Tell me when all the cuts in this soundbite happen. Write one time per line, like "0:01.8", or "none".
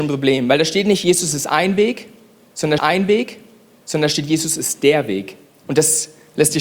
0:02.8